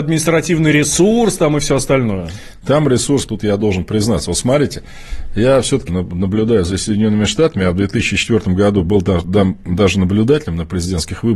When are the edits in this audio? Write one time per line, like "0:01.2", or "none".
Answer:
0:03.3
0:05.9